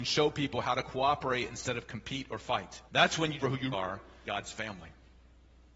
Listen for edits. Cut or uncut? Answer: cut